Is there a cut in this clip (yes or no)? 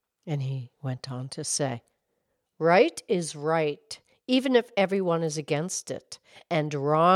no